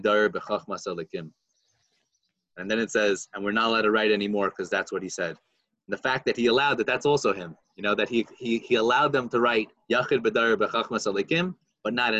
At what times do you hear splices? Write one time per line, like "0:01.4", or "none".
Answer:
none